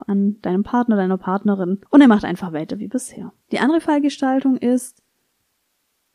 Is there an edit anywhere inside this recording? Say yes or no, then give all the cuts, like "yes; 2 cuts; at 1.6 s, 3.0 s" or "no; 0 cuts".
yes; 2 cuts; at 1.9 s, 3.4 s